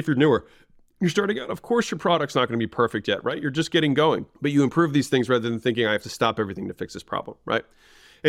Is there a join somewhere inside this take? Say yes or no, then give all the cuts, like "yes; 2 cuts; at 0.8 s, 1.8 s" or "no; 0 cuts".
yes; 1 cut; at 4.3 s